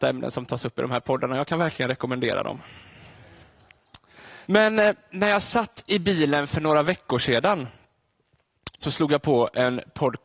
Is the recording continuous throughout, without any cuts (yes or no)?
no